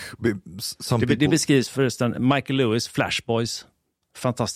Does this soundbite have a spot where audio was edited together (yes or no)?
no